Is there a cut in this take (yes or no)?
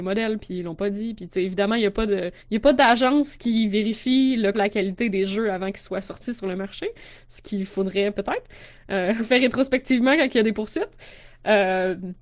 yes